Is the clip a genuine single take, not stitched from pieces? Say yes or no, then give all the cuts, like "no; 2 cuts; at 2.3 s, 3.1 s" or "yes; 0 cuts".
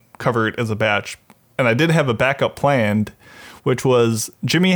yes; 0 cuts